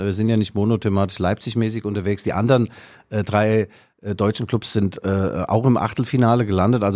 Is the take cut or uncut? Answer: uncut